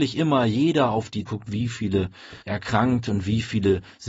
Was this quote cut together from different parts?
yes; 2 cuts; at 1.3 s, 2.4 s

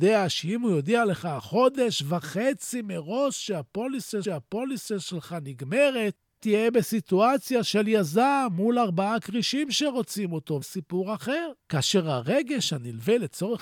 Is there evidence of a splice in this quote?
yes; 4 cuts; at 4.2 s, 6.4 s, 10.6 s, 11.6 s

